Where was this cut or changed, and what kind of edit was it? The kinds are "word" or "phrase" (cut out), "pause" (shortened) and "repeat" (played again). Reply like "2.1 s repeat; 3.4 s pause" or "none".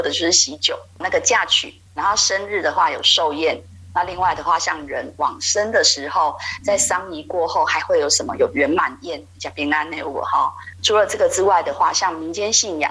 1.0 s word; 1.9 s pause